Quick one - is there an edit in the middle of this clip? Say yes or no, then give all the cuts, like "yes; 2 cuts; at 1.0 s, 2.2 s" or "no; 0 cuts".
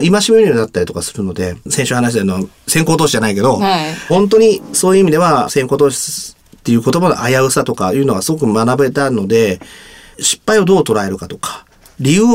yes; 1 cut; at 1.6 s